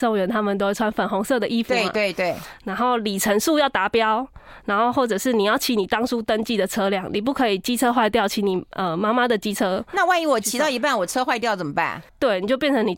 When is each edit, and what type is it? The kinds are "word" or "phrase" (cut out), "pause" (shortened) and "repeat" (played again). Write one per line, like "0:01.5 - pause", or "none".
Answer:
0:12.1 - pause